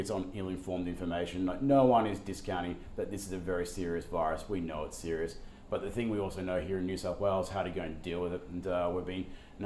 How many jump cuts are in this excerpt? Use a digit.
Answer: 0